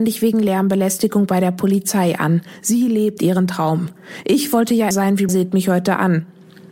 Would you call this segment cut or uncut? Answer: cut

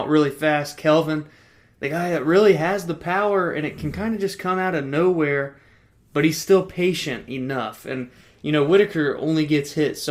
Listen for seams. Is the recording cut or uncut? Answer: uncut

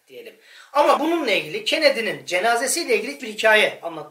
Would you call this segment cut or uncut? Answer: cut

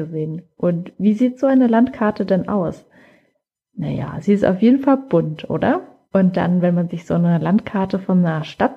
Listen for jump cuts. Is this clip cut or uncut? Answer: uncut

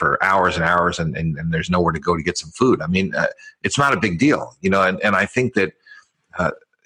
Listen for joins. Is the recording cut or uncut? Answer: uncut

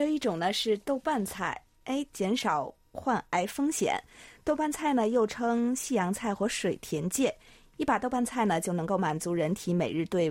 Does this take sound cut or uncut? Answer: uncut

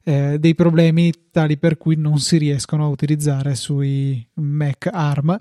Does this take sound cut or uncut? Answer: uncut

